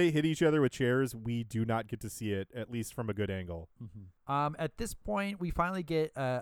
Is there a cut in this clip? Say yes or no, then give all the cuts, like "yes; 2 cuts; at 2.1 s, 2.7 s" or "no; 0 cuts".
yes; 1 cut; at 4.2 s